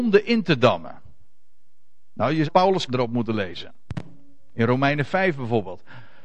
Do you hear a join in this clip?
yes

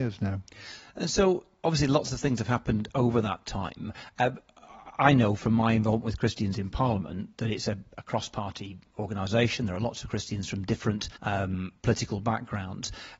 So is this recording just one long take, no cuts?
no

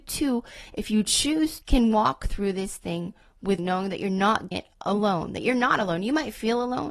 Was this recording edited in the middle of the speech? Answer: yes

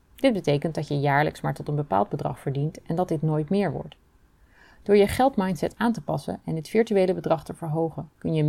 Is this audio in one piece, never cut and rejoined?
yes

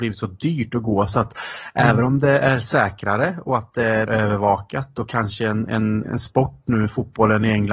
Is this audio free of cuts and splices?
no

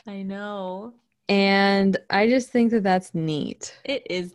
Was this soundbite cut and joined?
no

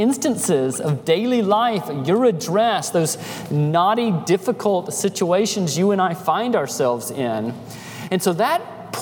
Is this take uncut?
yes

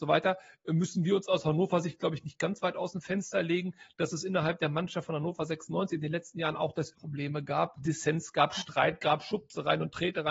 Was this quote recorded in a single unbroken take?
no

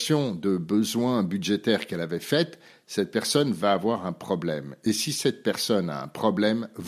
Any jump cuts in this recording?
no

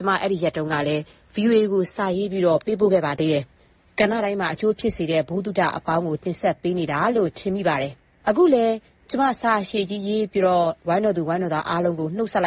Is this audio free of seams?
yes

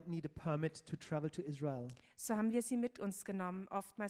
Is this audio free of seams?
yes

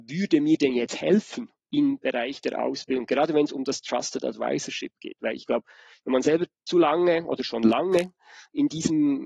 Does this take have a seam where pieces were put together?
no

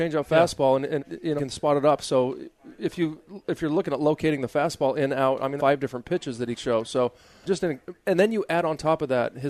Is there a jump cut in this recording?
yes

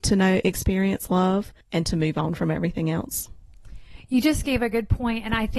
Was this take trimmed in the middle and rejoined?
yes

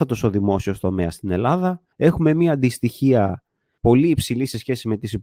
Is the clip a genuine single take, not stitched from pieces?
no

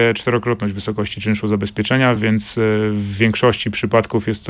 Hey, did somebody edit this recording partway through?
no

